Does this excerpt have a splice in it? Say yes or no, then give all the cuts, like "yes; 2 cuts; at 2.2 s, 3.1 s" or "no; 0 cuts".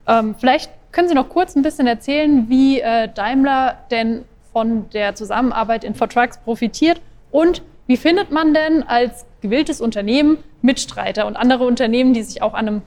yes; 1 cut; at 5.9 s